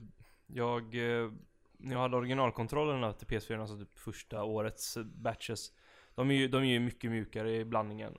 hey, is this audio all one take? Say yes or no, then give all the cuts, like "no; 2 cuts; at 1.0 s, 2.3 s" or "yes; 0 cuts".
yes; 0 cuts